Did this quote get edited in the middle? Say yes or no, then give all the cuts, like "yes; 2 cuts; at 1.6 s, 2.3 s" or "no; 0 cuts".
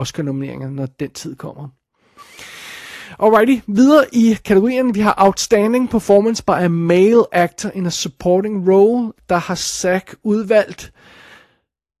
no; 0 cuts